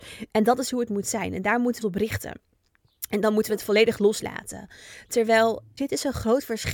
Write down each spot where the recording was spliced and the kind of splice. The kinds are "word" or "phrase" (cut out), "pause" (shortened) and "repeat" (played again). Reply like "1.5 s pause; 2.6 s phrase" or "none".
1.8 s word; 5.8 s word

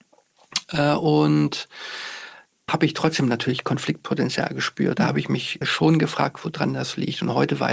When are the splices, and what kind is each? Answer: 2.7 s word; 5.0 s word; 5.6 s word

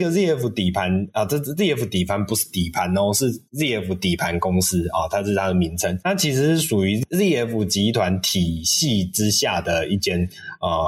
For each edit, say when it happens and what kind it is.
3.5 s pause

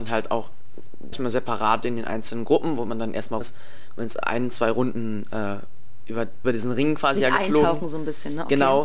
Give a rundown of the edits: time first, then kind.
1.1 s word; 3.4 s word; 6.4 s word

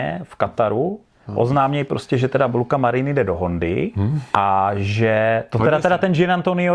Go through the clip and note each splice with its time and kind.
4.3 s pause

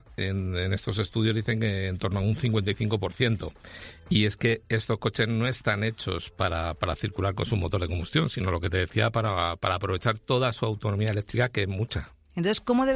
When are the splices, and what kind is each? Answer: none

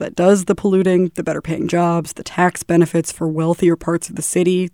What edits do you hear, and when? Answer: none

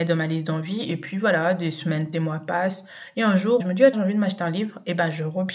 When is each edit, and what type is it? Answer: 2.1 s phrase; 3.6 s word; 3.9 s word

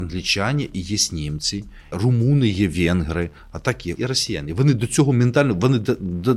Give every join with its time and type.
1.9 s word; 4.0 s word

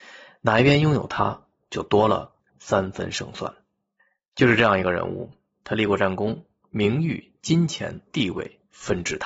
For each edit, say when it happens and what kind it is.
none

